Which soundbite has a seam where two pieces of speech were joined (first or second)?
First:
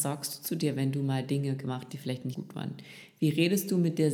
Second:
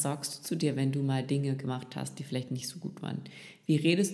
first